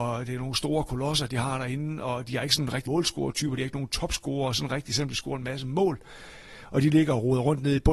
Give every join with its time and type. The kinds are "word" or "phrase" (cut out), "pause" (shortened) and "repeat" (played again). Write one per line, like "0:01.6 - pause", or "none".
0:02.9 - word